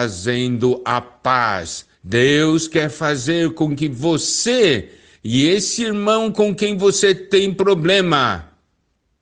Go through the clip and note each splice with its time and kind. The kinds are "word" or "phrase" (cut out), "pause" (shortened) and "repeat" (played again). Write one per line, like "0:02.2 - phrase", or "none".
0:01.9 - pause